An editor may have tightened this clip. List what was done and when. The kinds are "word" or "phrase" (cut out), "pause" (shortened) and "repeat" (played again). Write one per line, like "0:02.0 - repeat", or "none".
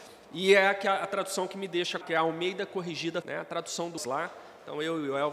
0:02.0 - word
0:03.2 - word
0:04.0 - word